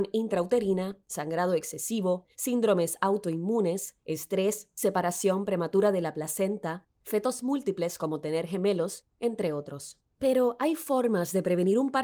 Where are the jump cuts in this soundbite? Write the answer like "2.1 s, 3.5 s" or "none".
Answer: 2.3 s